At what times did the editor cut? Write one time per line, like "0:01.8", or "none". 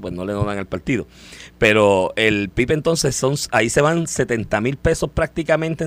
none